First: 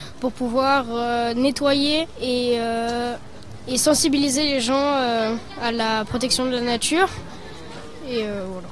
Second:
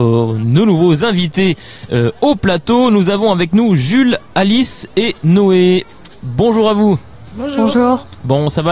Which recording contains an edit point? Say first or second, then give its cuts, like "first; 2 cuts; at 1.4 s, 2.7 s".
first; 1 cut; at 2.1 s